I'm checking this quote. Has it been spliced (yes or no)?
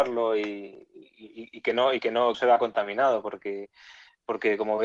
yes